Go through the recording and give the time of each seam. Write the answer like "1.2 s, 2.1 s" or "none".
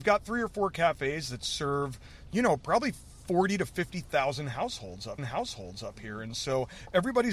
5.2 s